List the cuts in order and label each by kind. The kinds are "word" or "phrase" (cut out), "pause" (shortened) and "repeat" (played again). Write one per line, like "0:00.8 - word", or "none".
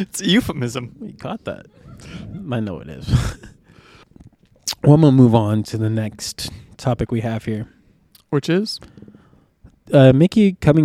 none